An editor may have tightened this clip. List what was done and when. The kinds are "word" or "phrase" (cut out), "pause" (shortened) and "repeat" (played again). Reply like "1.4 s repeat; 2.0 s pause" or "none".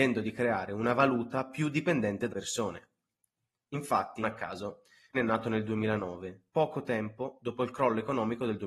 2.3 s word; 4.2 s word; 5.1 s word; 6.5 s pause